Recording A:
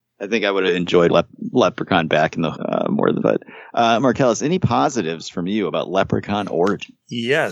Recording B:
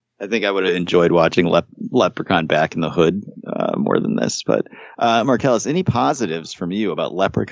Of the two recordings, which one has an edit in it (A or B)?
A